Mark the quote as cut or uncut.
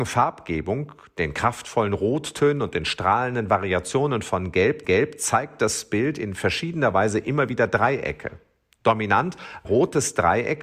cut